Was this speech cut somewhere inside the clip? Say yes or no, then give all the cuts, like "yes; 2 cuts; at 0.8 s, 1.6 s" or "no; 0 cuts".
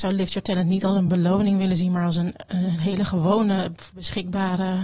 no; 0 cuts